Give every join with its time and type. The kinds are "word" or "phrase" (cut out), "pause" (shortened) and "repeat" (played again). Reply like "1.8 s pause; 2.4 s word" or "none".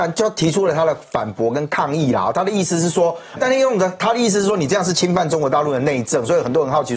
3.4 s word